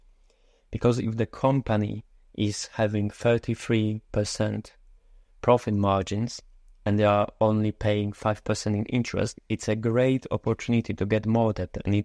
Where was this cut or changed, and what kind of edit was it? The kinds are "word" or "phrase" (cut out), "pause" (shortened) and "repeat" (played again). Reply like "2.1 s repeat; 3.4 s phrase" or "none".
none